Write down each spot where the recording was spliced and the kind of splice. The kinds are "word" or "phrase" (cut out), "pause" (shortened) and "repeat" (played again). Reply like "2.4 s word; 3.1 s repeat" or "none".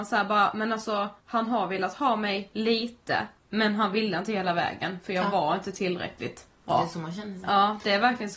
1.2 s pause; 3.4 s pause